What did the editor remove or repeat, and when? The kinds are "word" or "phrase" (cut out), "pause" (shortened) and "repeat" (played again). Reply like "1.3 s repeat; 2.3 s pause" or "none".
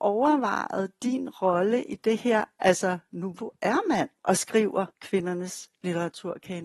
3.3 s word; 4.2 s pause; 4.9 s pause